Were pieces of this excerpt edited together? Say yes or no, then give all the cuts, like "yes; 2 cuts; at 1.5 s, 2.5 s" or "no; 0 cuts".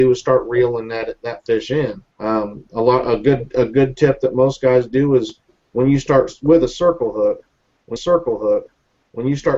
yes; 2 cuts; at 2.1 s, 8.0 s